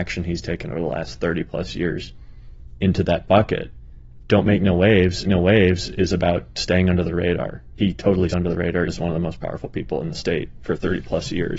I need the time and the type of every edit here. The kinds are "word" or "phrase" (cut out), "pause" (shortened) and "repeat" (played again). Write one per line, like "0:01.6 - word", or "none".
0:05.2 - repeat
0:08.3 - word
0:08.9 - word

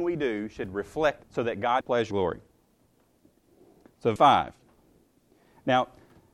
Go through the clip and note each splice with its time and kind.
0:01.2 - word
0:01.8 - word
0:02.1 - word
0:04.2 - word

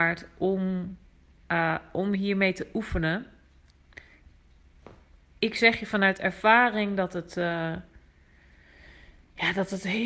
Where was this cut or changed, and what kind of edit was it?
none

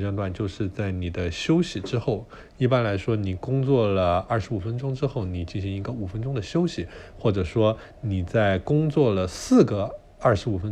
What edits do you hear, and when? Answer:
none

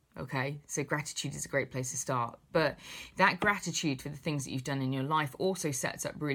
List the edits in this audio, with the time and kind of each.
none

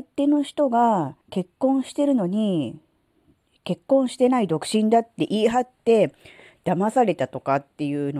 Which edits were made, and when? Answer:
0:01.2 - pause

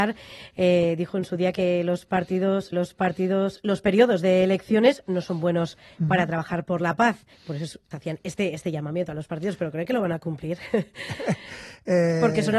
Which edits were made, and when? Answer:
0:02.7 - repeat
0:07.3 - pause
0:07.9 - phrase

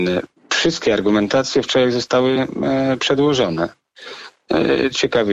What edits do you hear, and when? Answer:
none

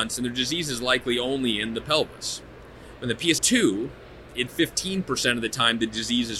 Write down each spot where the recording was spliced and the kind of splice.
0:03.4 - word
0:04.5 - word

